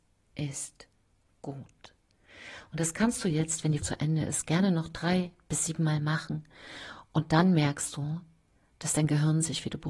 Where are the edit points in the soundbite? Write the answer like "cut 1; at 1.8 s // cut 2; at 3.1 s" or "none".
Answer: cut 1; at 3.8 s